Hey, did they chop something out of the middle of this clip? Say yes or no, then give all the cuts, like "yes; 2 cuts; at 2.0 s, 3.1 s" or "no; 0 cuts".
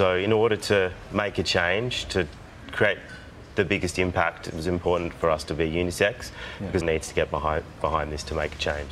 yes; 1 cut; at 6.8 s